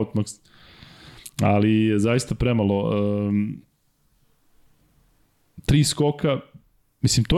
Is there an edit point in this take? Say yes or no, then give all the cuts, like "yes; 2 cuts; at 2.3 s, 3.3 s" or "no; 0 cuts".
no; 0 cuts